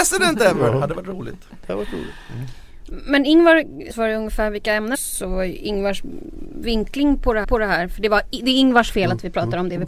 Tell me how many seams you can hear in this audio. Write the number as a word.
three